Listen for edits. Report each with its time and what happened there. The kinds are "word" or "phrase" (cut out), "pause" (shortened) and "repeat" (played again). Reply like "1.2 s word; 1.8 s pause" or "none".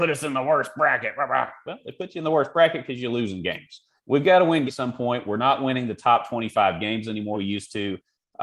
4.0 s pause; 4.7 s word; 7.3 s word